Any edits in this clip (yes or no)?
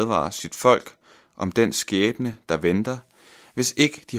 no